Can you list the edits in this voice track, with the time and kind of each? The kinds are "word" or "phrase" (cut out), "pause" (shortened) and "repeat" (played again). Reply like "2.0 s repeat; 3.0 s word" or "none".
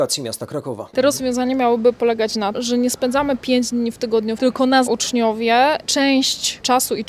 2.5 s word; 4.4 s word; 4.9 s word